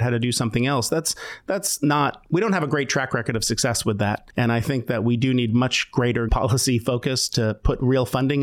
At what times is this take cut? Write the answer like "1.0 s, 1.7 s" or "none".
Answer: 6.3 s